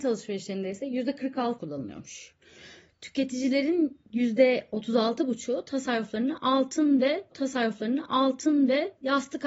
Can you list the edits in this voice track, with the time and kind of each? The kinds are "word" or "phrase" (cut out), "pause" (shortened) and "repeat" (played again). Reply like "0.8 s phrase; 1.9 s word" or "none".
1.6 s phrase; 7.3 s repeat

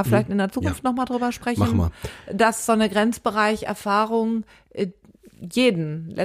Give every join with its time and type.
none

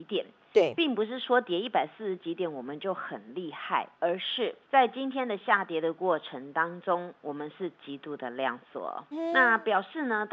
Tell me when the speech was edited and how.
3.9 s pause; 4.6 s pause; 9.1 s word

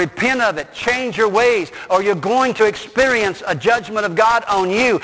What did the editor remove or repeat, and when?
none

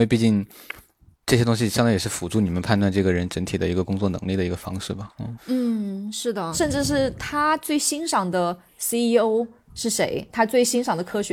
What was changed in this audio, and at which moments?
none

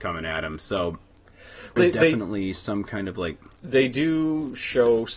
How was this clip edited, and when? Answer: 1.8 s word; 3.6 s pause

